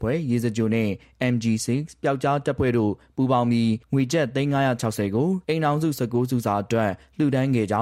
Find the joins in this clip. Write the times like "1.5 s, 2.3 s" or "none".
5.4 s